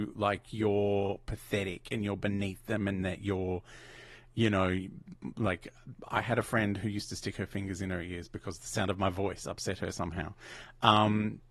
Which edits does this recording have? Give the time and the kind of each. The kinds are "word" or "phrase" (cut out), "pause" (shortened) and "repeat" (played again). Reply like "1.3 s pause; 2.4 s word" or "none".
none